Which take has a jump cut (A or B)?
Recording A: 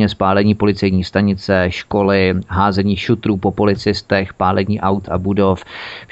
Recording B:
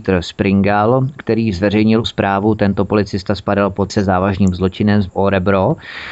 B